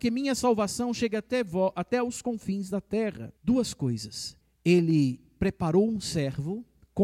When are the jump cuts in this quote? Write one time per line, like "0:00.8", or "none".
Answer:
0:03.4
0:04.4